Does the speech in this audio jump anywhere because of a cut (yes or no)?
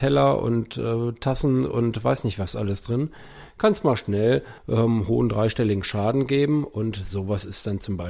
yes